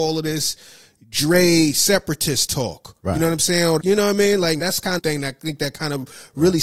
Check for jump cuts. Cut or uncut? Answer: cut